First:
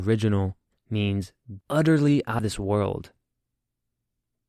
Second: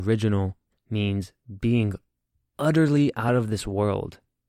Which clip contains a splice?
first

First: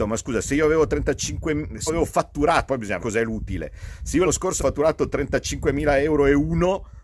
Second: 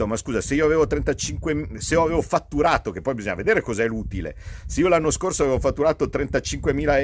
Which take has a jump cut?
first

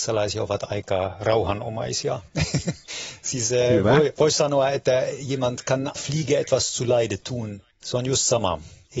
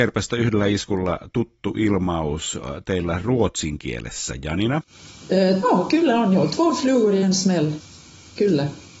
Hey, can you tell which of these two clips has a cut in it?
first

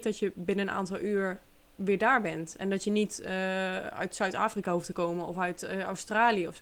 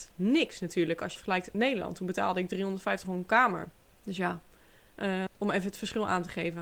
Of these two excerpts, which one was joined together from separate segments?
second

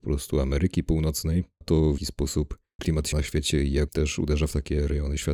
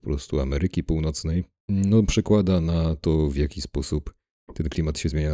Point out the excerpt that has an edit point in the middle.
first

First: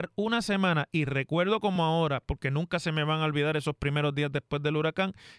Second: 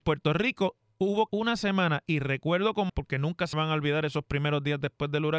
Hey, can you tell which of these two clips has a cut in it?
second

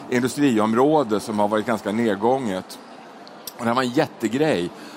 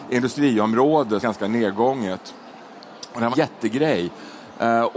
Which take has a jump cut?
second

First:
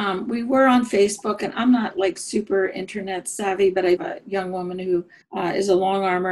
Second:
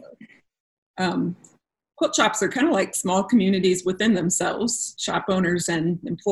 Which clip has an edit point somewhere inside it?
first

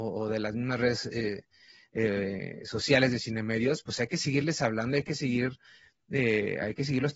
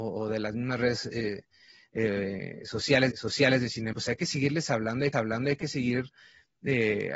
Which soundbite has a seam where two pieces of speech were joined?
second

